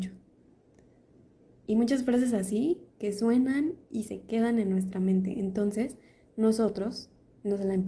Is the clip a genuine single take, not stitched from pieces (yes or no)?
yes